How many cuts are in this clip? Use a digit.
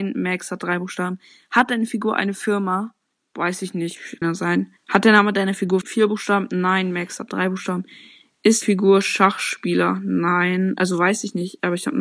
4